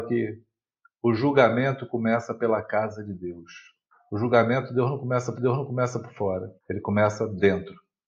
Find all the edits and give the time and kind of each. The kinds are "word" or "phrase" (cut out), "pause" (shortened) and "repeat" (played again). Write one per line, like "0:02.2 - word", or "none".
0:03.9 - pause
0:05.4 - repeat
0:06.6 - pause